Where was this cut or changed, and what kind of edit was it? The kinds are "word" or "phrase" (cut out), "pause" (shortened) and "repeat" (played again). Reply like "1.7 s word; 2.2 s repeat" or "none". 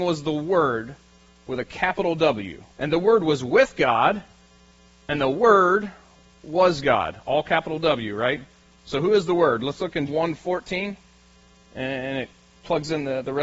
2.7 s pause; 10.1 s word